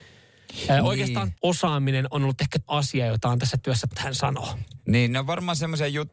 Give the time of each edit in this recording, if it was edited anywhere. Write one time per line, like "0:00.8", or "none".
0:01.3
0:02.7
0:03.9